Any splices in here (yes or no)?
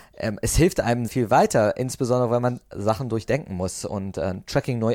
yes